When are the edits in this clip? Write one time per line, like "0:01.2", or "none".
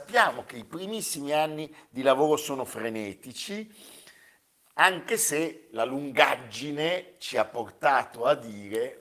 none